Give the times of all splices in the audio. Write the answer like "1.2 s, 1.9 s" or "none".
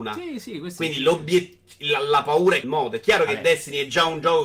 2.6 s